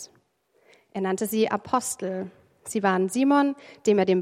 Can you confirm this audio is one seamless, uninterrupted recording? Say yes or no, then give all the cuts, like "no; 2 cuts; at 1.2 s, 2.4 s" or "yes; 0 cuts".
yes; 0 cuts